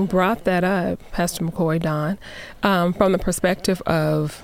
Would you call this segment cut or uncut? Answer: uncut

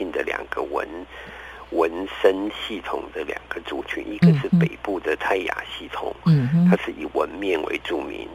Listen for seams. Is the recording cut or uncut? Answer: uncut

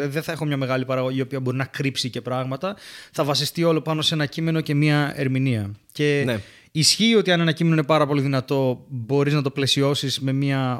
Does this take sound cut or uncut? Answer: uncut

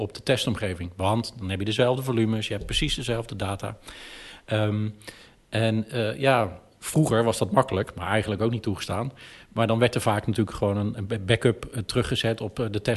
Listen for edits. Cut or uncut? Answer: uncut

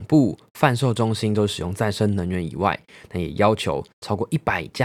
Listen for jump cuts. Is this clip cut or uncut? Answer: uncut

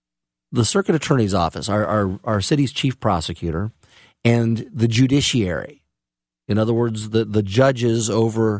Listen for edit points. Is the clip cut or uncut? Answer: uncut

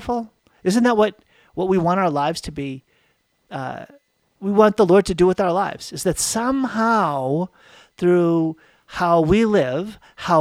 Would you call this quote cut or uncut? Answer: uncut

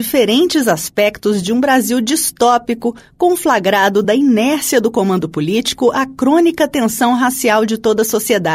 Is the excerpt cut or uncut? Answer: uncut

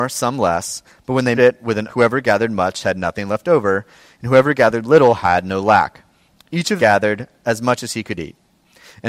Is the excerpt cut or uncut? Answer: cut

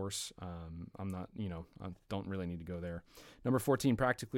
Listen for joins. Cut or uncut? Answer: uncut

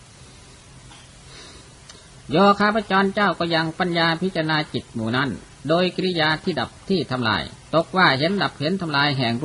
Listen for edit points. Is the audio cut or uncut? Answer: uncut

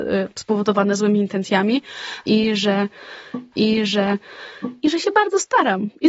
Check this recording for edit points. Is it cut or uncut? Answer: cut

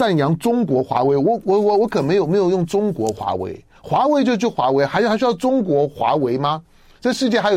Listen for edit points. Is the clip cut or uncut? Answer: uncut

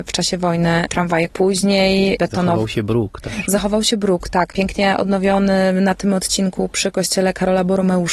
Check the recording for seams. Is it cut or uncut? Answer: uncut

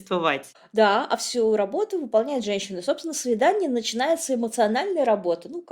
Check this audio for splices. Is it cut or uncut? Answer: uncut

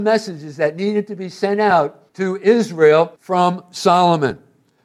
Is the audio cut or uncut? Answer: cut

